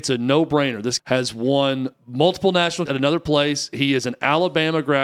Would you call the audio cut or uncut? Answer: cut